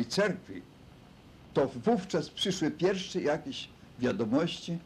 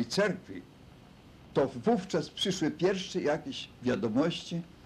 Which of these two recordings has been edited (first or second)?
second